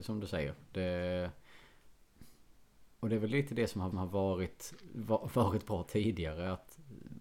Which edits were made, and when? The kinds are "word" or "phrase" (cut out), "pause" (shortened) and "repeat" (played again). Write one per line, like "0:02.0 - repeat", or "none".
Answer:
0:03.9 - repeat